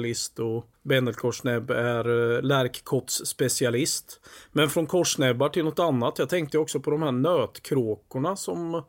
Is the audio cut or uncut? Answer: uncut